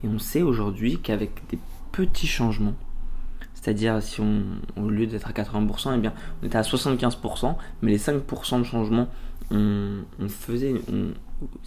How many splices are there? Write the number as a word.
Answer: zero